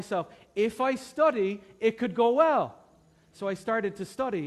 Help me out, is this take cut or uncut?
uncut